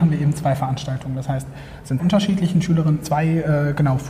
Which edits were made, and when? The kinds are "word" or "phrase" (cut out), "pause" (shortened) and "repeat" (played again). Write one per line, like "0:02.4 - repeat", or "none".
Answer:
0:02.0 - phrase
0:03.0 - word